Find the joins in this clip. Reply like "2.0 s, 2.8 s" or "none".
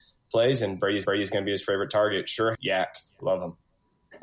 1.0 s, 2.5 s